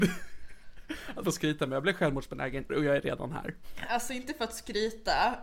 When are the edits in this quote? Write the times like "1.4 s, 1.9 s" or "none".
1.2 s, 2.7 s